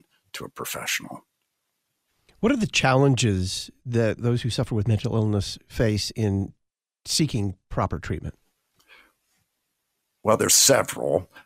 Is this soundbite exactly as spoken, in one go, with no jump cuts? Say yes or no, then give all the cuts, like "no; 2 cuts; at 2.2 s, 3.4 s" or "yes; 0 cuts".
yes; 0 cuts